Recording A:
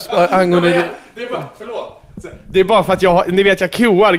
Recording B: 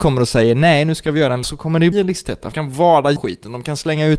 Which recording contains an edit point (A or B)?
B